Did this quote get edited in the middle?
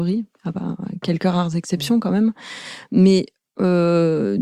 no; 0 cuts

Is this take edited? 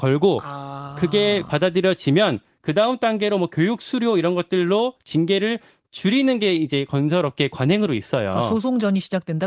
no; 0 cuts

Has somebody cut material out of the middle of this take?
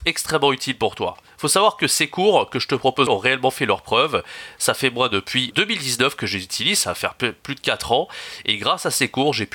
yes; 2 cuts; at 3.1 s, 5.5 s

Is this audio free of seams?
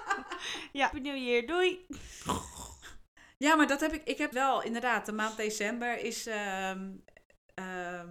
no; 2 cuts; at 0.9 s, 4.3 s

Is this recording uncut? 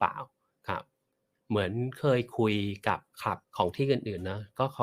no; 1 cut; at 3.4 s

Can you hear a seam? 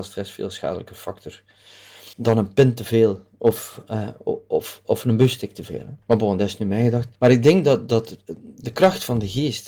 yes; 3 cuts; at 2.1 s, 6.0 s, 7.2 s

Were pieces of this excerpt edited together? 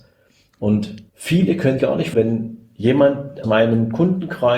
yes; 4 cuts; at 1.1 s, 1.8 s, 2.1 s, 3.4 s

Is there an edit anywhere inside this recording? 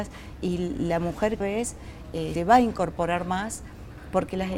yes; 2 cuts; at 1.4 s, 2.4 s

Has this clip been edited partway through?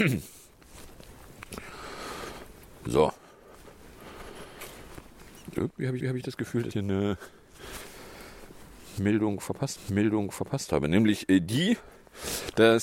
yes; 3 cuts; at 6.0 s, 6.7 s, 9.8 s

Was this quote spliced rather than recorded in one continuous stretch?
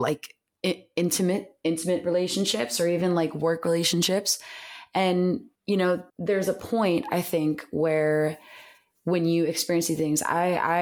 yes; 2 cuts; at 5.5 s, 6.1 s

